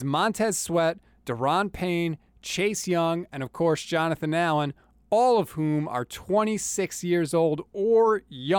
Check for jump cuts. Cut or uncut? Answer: uncut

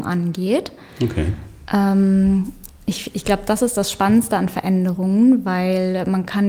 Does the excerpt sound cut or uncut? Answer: uncut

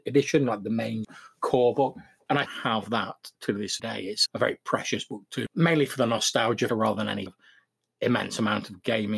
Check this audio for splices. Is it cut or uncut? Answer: cut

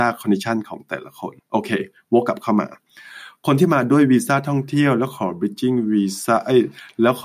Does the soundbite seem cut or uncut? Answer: cut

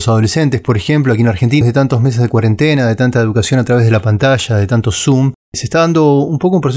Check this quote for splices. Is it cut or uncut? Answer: cut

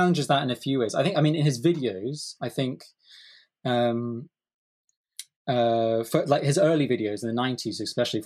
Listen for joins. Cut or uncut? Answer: uncut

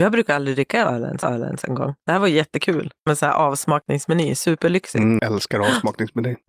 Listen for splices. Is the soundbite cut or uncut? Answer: cut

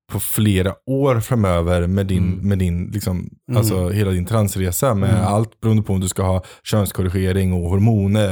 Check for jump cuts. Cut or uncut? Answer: uncut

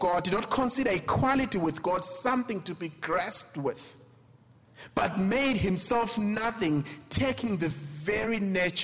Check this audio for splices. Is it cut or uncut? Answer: uncut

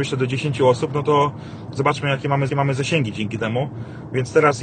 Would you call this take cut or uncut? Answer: cut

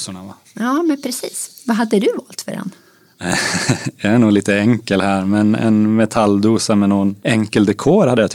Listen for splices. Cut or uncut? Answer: cut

